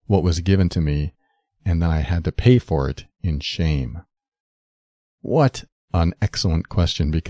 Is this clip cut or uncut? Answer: uncut